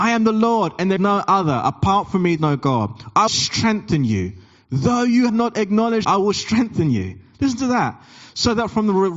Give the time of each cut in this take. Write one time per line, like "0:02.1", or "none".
0:01.0
0:02.4
0:03.3
0:05.3
0:06.0